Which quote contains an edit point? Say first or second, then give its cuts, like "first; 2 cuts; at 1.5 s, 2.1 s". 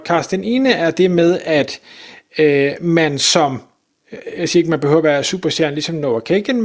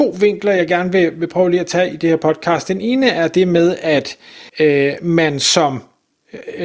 second; 1 cut; at 4.5 s